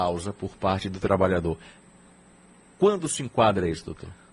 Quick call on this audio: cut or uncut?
uncut